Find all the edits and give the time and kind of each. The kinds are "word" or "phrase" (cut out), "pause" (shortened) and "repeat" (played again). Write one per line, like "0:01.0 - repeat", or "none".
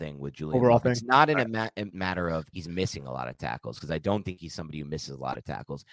0:01.9 - word
0:02.5 - pause